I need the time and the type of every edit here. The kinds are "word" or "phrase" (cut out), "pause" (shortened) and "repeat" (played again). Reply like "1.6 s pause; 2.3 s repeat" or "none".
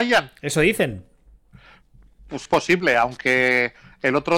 2.5 s word